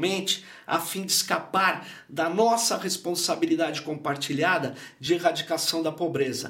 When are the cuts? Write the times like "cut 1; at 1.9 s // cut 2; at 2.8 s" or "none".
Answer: none

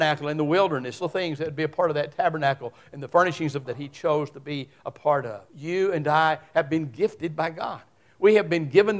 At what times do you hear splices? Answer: cut 1; at 1.0 s // cut 2; at 3.6 s // cut 3; at 5.5 s

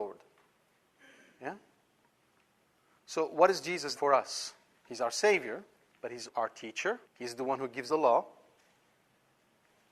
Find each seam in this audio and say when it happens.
cut 1; at 4.0 s // cut 2; at 4.7 s // cut 3; at 5.9 s // cut 4; at 6.3 s // cut 5; at 7.0 s // cut 6; at 7.9 s

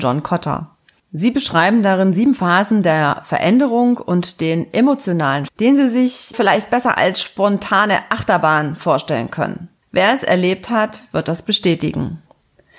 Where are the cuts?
cut 1; at 1.0 s // cut 2; at 5.5 s // cut 3; at 6.3 s // cut 4; at 9.8 s

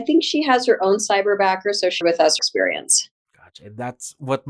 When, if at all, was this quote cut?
cut 1; at 2.0 s // cut 2; at 2.4 s

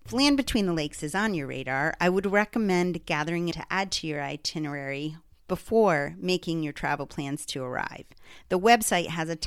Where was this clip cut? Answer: cut 1; at 3.5 s

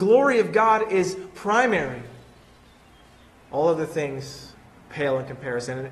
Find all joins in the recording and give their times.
none

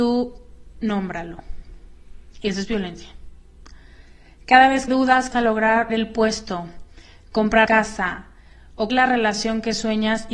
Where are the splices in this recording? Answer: cut 1; at 4.9 s // cut 2; at 5.3 s // cut 3; at 5.9 s // cut 4; at 7.7 s // cut 5; at 8.9 s

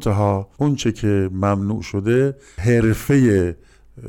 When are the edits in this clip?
none

